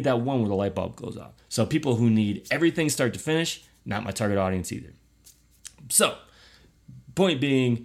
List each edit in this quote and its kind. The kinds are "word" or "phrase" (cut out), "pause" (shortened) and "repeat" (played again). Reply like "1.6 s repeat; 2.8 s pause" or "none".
1.4 s pause; 5.8 s pause